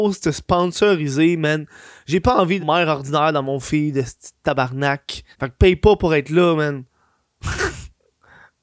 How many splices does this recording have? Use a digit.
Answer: 2